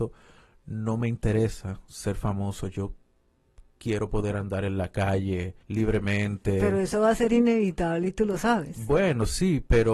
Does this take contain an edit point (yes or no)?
yes